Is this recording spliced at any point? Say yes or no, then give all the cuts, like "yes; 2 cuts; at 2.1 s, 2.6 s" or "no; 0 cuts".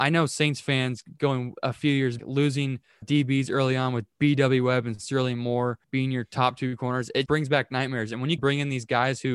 yes; 5 cuts; at 2.2 s, 3.0 s, 5.8 s, 7.3 s, 8.4 s